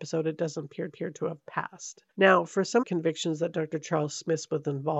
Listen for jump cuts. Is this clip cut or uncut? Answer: cut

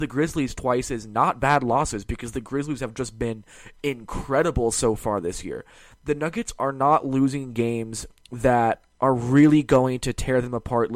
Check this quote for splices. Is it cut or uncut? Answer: uncut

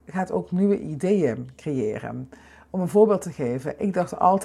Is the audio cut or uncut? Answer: uncut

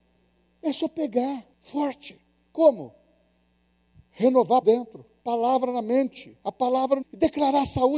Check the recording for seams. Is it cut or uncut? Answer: cut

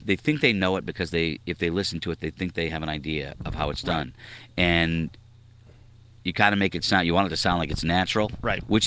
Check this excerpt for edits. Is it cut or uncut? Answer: uncut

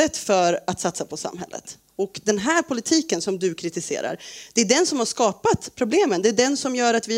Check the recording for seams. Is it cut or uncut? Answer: uncut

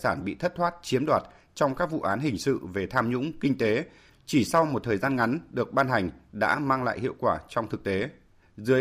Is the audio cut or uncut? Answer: uncut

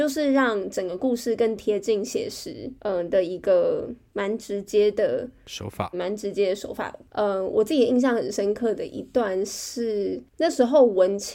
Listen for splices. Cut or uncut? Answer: cut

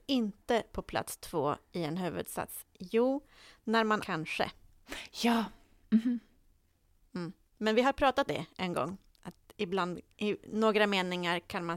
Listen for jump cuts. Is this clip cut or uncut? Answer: cut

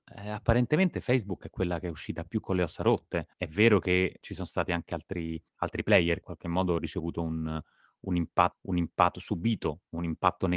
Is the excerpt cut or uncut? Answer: cut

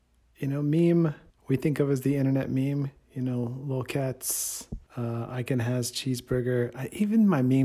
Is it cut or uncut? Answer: cut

